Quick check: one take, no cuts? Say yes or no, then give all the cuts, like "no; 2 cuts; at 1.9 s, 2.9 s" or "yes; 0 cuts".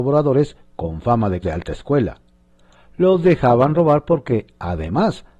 no; 1 cut; at 1.4 s